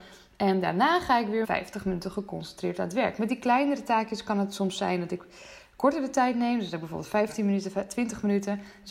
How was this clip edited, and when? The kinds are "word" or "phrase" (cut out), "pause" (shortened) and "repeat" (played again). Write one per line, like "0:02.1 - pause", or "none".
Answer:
0:01.4 - word